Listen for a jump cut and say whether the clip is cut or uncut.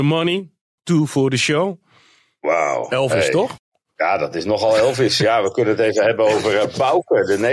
uncut